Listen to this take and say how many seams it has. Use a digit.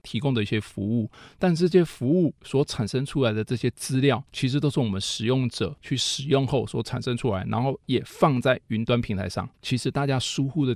2